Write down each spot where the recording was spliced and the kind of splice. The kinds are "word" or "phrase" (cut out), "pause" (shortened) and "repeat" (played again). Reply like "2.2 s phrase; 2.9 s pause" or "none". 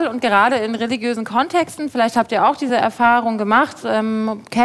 none

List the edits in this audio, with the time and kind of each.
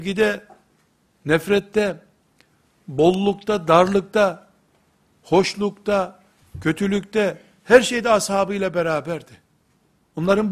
none

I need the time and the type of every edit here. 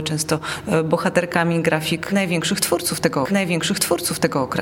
3.2 s repeat

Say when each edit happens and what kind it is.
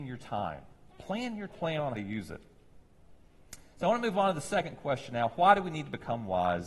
1.5 s phrase; 1.9 s word

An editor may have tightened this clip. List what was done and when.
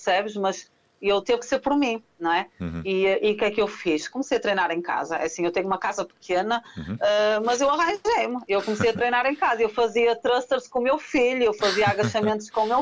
none

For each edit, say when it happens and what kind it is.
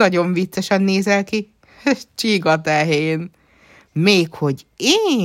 none

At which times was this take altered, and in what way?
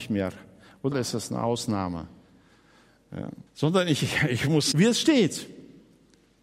0.9 s phrase; 3.5 s pause; 4.7 s phrase

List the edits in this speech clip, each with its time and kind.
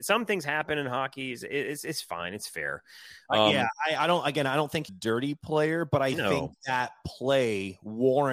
4.9 s phrase

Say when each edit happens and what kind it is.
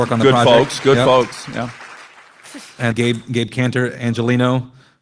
2.9 s word

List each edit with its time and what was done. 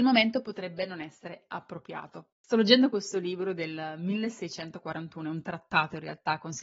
2.4 s pause

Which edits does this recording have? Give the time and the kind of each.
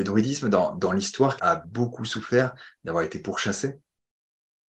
1.4 s word

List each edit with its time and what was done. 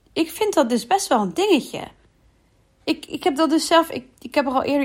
none

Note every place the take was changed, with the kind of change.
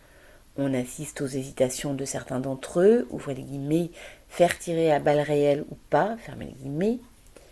none

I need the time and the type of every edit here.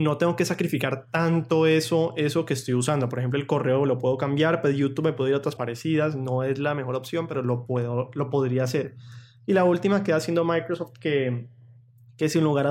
5.6 s phrase

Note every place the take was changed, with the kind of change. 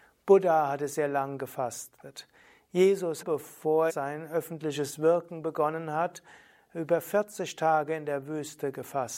3.2 s word; 3.9 s word

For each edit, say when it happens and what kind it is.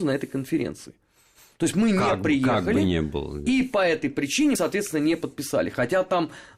4.5 s word

